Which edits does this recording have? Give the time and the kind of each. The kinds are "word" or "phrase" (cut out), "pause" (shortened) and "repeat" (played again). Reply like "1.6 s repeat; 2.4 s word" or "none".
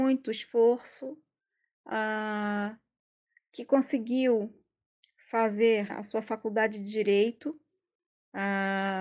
5.9 s word